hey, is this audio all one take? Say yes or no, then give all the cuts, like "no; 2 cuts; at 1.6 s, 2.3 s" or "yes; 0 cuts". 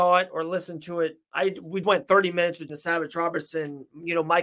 no; 2 cuts; at 1.8 s, 2.7 s